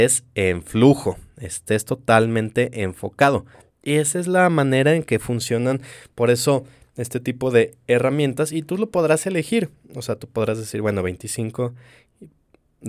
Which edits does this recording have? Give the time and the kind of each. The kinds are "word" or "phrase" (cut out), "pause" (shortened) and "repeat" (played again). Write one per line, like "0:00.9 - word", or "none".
0:03.7 - pause